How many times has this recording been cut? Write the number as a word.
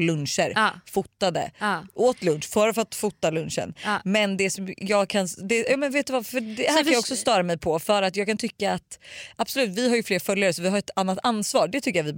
zero